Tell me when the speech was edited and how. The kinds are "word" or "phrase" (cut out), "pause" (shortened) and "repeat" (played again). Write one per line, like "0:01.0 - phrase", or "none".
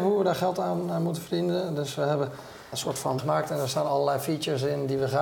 0:02.7 - word
0:03.2 - word